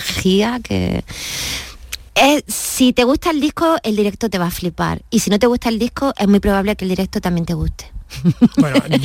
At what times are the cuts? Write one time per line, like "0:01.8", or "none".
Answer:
0:02.1